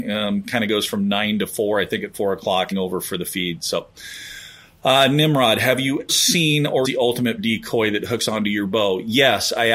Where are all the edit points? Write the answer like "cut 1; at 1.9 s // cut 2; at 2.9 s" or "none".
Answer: cut 1; at 2.7 s // cut 2; at 6.1 s // cut 3; at 6.8 s // cut 4; at 7.4 s